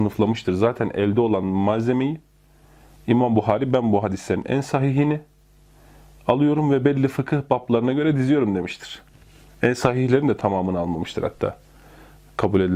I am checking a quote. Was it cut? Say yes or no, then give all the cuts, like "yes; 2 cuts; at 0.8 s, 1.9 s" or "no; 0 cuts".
no; 0 cuts